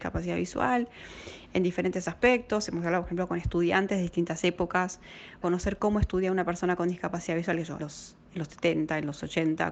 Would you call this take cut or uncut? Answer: cut